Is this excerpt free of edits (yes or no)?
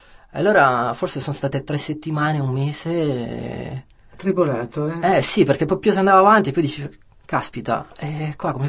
yes